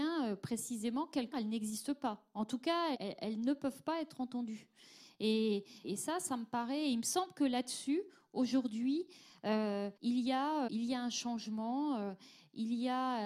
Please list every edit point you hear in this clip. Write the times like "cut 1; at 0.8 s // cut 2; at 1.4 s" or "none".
cut 1; at 1.3 s // cut 2; at 2.9 s // cut 3; at 5.8 s // cut 4; at 10.0 s // cut 5; at 10.7 s

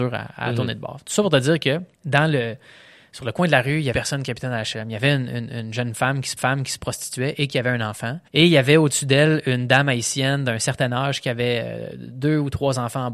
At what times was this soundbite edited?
cut 1; at 1.9 s // cut 2; at 3.9 s // cut 3; at 6.4 s // cut 4; at 8.3 s

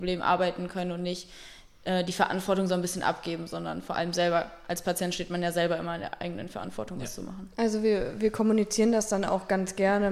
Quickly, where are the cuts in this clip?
none

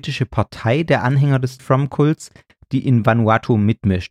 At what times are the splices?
cut 1; at 1.6 s

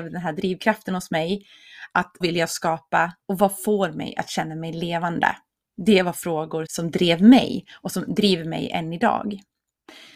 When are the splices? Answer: cut 1; at 2.2 s // cut 2; at 3.2 s // cut 3; at 6.7 s

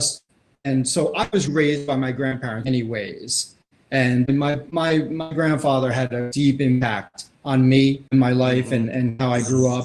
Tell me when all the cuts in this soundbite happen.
cut 1; at 1.5 s // cut 2; at 2.6 s // cut 3; at 4.3 s // cut 4; at 7.3 s // cut 5; at 8.1 s

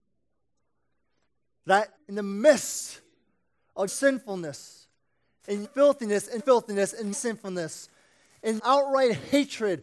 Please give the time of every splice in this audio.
cut 1; at 2.0 s // cut 2; at 3.9 s // cut 3; at 5.6 s // cut 4; at 6.4 s // cut 5; at 7.1 s // cut 6; at 8.6 s

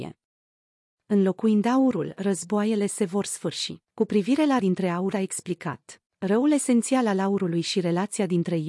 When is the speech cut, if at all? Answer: cut 1; at 3.8 s // cut 2; at 4.6 s // cut 3; at 5.1 s // cut 4; at 6.1 s

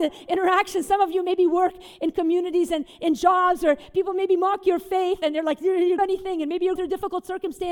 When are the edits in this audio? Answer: cut 1; at 6.0 s // cut 2; at 6.8 s

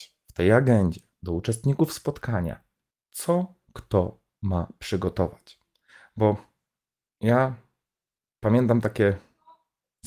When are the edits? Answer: none

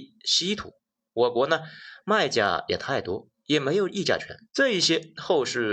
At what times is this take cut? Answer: cut 1; at 4.5 s

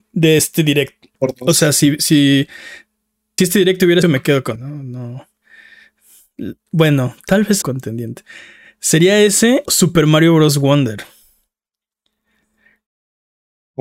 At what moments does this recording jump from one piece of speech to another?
cut 1; at 1.1 s // cut 2; at 3.4 s // cut 3; at 4.0 s // cut 4; at 4.6 s // cut 5; at 6.6 s // cut 6; at 7.6 s // cut 7; at 9.7 s

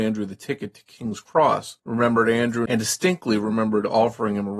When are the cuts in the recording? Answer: cut 1; at 1.8 s

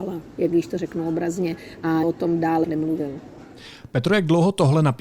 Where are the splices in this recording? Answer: cut 1; at 2.0 s // cut 2; at 2.6 s

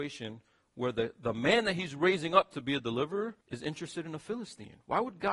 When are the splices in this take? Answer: cut 1; at 3.4 s

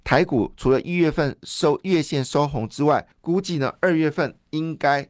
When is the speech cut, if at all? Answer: cut 1; at 3.1 s

